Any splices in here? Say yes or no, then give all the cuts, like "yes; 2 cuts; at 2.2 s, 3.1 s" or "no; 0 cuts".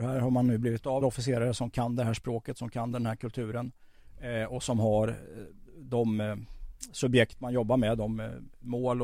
yes; 1 cut; at 1.0 s